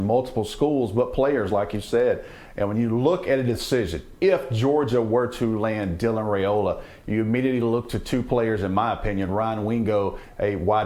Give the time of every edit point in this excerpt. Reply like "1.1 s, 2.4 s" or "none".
none